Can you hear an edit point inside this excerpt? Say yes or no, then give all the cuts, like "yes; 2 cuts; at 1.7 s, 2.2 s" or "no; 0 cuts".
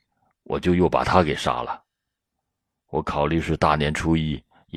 no; 0 cuts